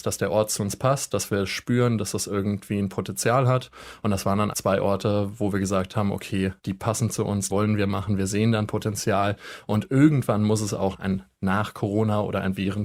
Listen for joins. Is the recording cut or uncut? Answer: cut